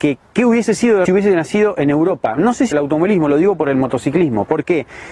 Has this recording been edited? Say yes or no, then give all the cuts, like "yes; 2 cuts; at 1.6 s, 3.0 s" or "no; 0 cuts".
yes; 2 cuts; at 1.1 s, 2.7 s